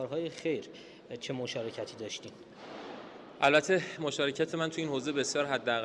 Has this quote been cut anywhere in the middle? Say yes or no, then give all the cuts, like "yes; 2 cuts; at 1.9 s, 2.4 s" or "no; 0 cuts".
no; 0 cuts